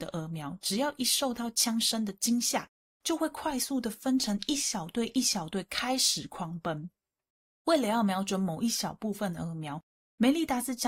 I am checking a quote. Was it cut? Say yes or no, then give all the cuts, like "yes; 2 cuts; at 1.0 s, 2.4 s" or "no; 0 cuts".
no; 0 cuts